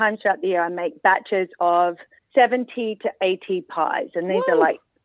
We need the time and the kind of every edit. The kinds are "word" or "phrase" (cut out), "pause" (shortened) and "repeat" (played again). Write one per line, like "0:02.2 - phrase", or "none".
0:02.2 - pause